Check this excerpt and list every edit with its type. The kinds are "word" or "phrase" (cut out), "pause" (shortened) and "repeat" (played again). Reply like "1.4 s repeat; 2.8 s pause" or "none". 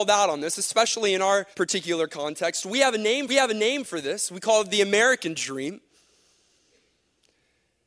1.5 s pause; 3.3 s repeat